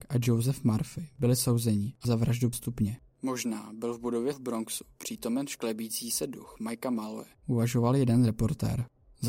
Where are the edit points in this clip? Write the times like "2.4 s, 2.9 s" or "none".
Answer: 2.0 s, 2.5 s, 4.3 s